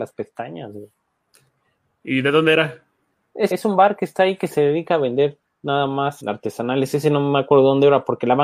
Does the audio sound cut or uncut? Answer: cut